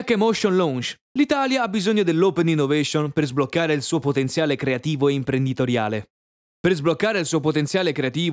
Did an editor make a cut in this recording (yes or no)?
yes